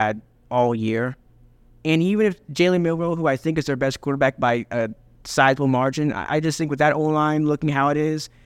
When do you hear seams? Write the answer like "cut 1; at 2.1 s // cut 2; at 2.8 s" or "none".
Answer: none